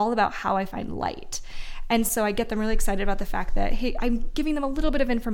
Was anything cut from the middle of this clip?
no; 0 cuts

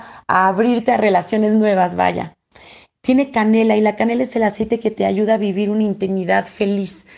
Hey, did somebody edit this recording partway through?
no; 0 cuts

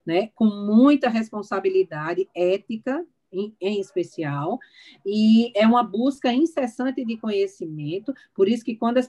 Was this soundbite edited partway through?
no; 0 cuts

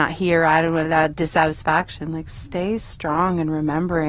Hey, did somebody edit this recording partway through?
no; 0 cuts

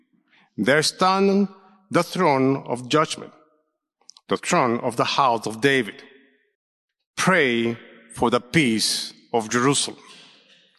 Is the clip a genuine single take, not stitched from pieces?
yes; 0 cuts

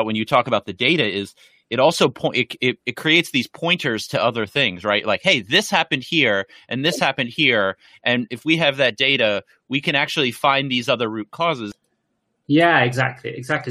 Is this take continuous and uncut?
yes; 0 cuts

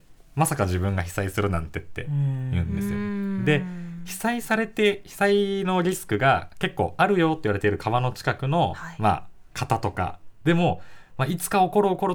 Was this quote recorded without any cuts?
yes; 0 cuts

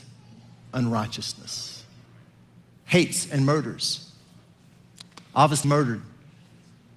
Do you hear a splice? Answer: yes; 1 cut; at 5.6 s

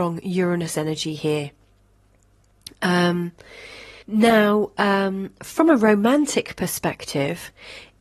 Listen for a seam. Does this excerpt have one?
yes; 1 cut; at 4.0 s

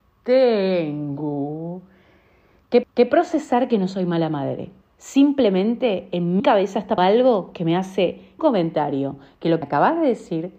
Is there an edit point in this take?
yes; 6 cuts; at 2.8 s, 4.8 s, 6.4 s, 7.0 s, 8.4 s, 9.6 s

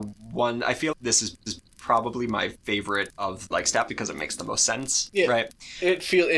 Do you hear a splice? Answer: yes; 5 cuts; at 0.9 s, 1.5 s, 2.6 s, 3.5 s, 3.9 s

